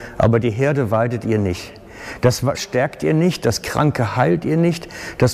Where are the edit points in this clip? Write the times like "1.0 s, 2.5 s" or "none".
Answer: 2.5 s